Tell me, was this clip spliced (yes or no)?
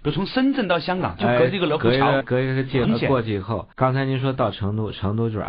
yes